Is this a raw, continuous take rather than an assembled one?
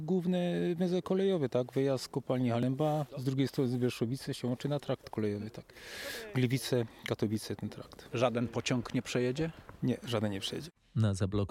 yes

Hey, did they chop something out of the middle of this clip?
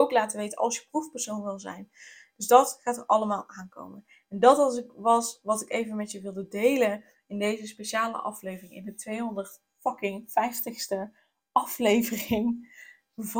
no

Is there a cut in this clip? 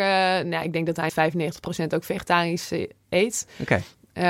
yes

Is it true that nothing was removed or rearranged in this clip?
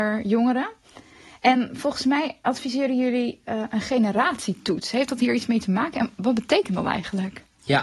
yes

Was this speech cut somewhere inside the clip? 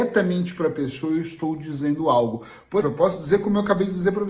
yes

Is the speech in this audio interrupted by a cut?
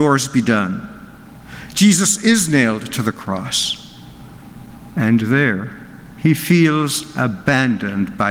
no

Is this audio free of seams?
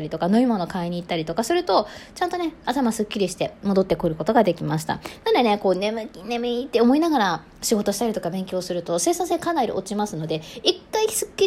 yes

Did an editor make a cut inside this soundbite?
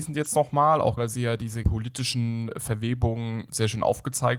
yes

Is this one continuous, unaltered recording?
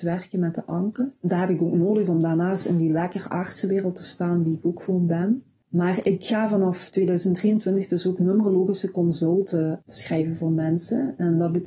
yes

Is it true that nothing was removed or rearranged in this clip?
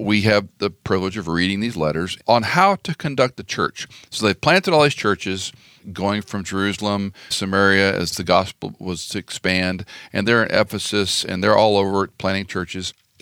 no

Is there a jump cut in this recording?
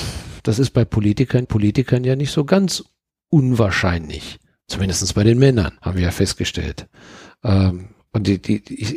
yes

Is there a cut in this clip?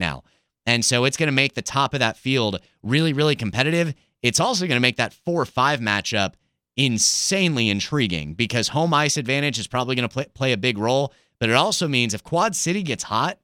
no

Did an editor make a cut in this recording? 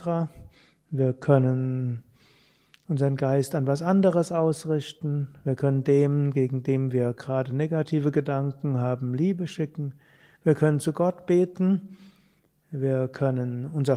no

